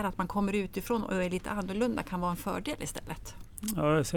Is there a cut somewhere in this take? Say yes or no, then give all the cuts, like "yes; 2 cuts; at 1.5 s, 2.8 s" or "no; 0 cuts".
no; 0 cuts